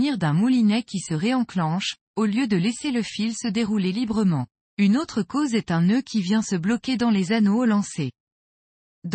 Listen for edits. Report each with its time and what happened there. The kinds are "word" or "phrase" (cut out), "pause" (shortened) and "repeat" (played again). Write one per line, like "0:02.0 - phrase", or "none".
0:04.6 - pause